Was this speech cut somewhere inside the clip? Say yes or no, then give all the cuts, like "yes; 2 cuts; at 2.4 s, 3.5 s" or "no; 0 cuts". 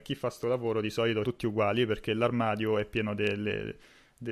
yes; 1 cut; at 1.2 s